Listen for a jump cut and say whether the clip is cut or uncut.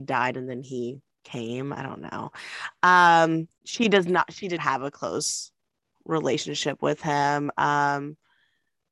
cut